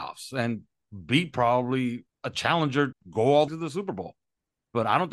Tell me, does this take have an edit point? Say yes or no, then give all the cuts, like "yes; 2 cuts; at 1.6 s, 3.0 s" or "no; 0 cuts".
yes; 3 cuts; at 2.1 s, 2.9 s, 3.5 s